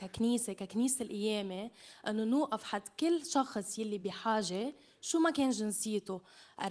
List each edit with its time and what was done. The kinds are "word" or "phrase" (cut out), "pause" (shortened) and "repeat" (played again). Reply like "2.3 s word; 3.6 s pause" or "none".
none